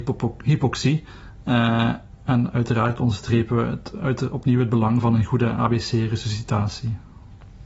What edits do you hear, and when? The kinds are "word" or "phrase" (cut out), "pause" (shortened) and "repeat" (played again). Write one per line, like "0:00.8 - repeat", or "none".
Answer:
none